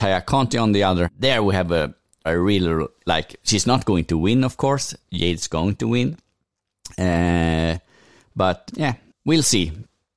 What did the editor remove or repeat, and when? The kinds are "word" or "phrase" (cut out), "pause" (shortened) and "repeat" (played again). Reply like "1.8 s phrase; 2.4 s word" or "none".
1.0 s word; 2.2 s word; 3.1 s word; 8.7 s word